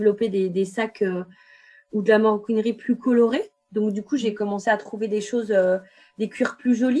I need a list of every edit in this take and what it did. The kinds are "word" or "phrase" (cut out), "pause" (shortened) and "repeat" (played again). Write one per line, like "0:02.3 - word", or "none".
none

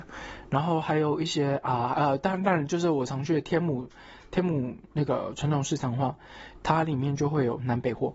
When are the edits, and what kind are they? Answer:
none

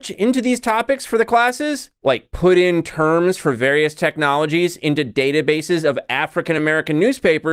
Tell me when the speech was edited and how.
none

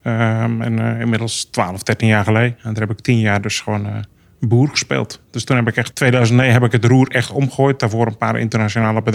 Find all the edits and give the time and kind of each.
0:05.9 - word

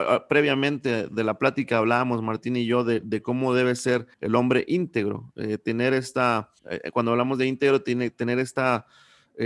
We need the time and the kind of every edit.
0:04.1 - pause
0:06.6 - pause

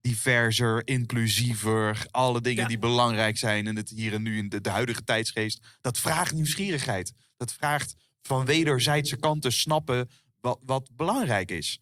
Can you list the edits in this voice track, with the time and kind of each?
none

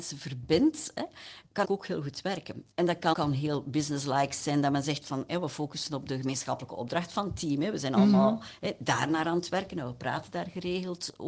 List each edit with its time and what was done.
0:01.6 - word
0:03.1 - word

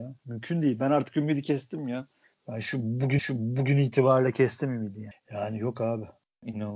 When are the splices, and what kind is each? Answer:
0:03.2 - repeat

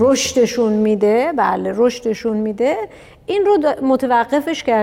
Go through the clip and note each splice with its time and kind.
none

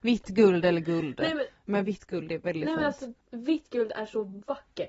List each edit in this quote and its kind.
0:03.2 - pause

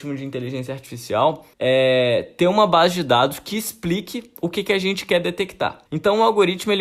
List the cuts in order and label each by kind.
0:01.5 - pause
0:05.9 - pause

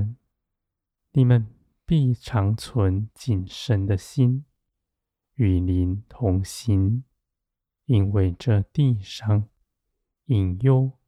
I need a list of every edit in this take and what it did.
none

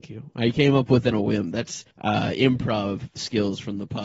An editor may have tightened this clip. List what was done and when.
0:01.1 - word
0:01.9 - pause

